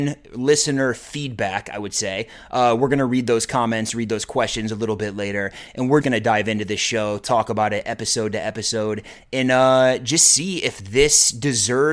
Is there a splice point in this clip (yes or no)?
yes